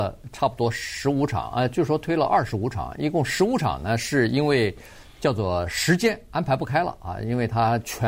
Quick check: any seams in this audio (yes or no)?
no